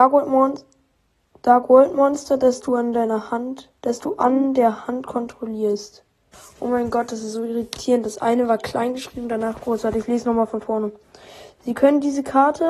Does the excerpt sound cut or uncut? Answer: cut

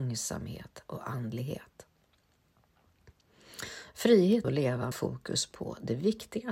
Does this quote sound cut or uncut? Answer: cut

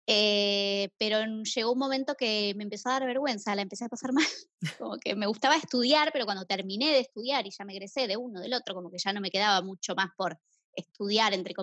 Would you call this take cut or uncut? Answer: uncut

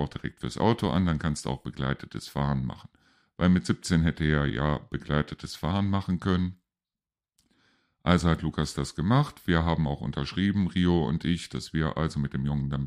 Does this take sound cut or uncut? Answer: uncut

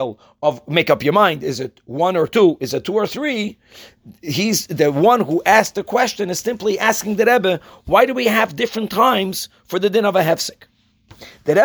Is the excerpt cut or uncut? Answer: uncut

